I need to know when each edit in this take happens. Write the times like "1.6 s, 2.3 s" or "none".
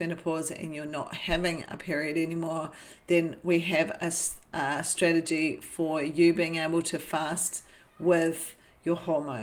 none